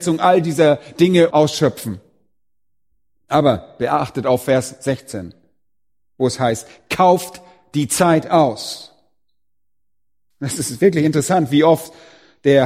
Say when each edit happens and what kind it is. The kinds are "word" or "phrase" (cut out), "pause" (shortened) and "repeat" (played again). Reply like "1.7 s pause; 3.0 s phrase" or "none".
none